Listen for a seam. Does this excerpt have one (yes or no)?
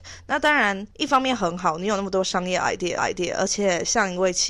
yes